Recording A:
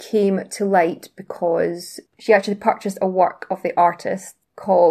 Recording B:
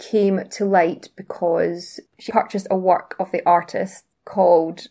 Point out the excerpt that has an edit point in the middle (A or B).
B